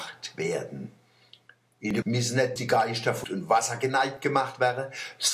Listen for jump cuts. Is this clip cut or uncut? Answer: cut